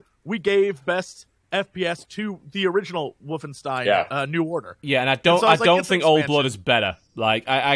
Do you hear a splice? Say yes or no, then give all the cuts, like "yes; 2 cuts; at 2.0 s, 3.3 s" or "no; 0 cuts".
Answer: no; 0 cuts